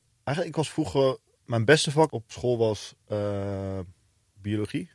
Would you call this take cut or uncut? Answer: cut